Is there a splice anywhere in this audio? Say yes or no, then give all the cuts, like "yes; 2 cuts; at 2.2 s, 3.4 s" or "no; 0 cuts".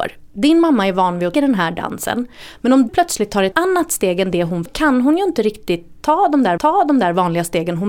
yes; 5 cuts; at 1.3 s, 2.9 s, 3.5 s, 4.7 s, 6.6 s